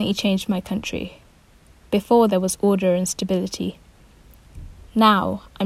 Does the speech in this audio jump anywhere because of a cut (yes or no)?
no